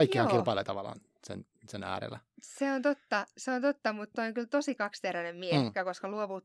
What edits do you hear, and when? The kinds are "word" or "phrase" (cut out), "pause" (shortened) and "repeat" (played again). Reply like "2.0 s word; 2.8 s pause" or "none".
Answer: none